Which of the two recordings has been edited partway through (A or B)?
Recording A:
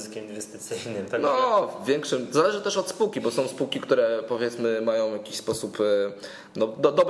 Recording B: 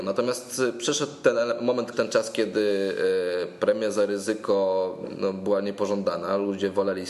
B